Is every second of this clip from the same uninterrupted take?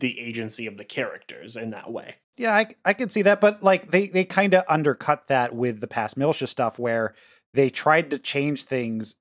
no; 1 cut; at 2.2 s

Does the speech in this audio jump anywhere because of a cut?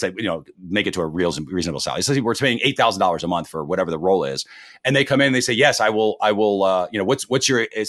no; 0 cuts

